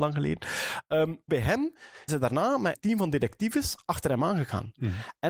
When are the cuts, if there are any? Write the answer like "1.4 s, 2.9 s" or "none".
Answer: 1.3 s, 2.1 s, 2.7 s